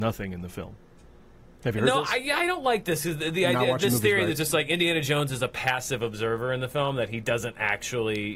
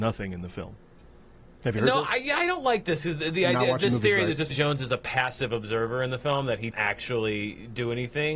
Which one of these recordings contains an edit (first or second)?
second